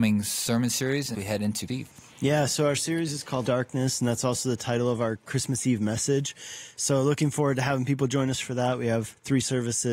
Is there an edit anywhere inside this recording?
yes; 3 cuts; at 1.1 s, 1.7 s, 3.4 s

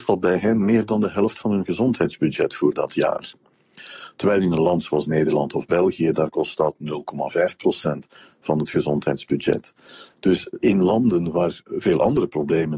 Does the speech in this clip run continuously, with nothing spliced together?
yes; 0 cuts

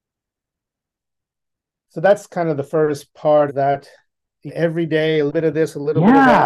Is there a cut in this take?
yes; 3 cuts; at 3.5 s, 4.5 s, 5.3 s

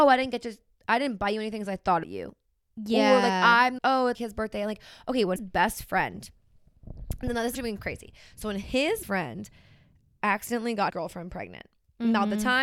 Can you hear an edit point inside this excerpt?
yes; 7 cuts; at 2.0 s, 3.8 s, 4.1 s, 5.4 s, 7.5 s, 9.0 s, 10.9 s

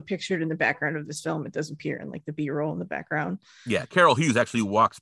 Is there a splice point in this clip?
no; 0 cuts

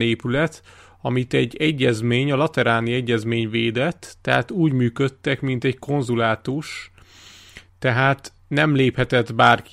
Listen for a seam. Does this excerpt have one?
no; 0 cuts

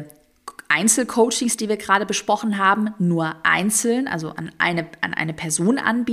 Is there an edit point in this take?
no; 0 cuts

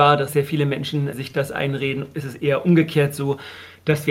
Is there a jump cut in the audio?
no; 0 cuts

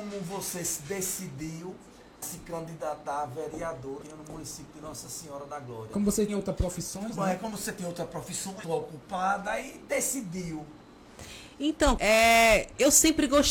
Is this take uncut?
no; 5 cuts; at 2.2 s, 4.0 s, 6.3 s, 8.6 s, 12.0 s

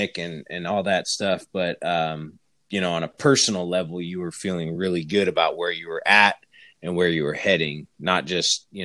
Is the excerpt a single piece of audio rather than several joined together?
yes; 0 cuts

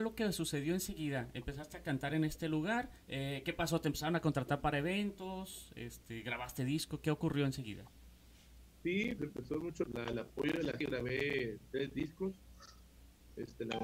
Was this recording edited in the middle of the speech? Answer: yes; 4 cuts; at 3.0 s, 9.2 s, 9.9 s, 10.8 s

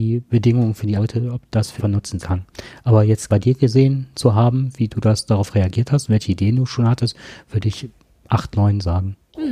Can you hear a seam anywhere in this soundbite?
yes; 4 cuts; at 1.0 s, 1.8 s, 2.2 s, 3.3 s

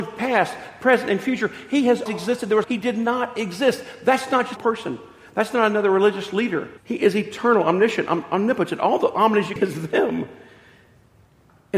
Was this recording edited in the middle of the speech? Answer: yes; 5 cuts; at 2.1 s, 2.6 s, 4.6 s, 6.8 s, 9.6 s

